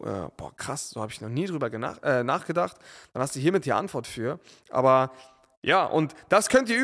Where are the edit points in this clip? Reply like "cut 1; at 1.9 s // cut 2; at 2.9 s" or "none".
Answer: none